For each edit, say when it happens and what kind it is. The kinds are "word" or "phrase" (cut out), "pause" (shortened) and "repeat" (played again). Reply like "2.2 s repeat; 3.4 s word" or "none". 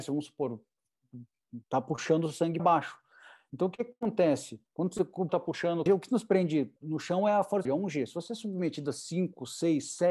1.6 s pause; 2.6 s word; 4.7 s pause; 5.3 s word; 5.9 s phrase; 6.8 s pause; 7.6 s phrase